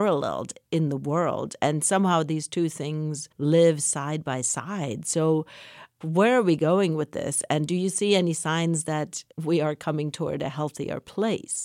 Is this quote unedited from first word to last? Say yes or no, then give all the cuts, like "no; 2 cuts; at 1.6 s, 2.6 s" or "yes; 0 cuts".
no; 3 cuts; at 3.3 s, 6.0 s, 9.3 s